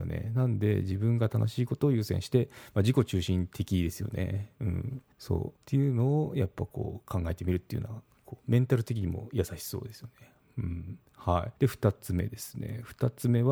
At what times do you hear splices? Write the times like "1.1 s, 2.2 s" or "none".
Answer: 5.1 s, 5.6 s, 11.6 s